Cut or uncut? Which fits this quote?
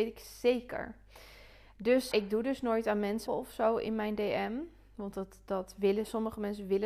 cut